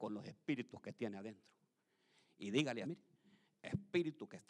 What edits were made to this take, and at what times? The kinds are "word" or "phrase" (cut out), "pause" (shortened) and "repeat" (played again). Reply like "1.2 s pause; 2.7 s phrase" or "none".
2.8 s word